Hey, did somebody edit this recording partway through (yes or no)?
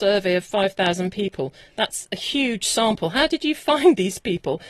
no